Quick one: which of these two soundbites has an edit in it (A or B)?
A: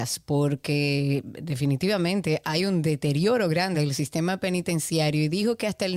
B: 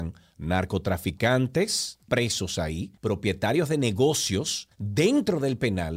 B